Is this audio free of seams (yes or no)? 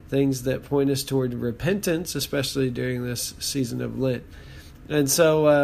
yes